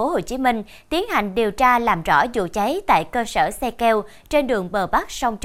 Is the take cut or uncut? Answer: uncut